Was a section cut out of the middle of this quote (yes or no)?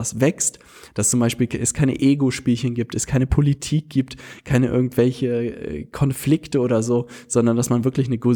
no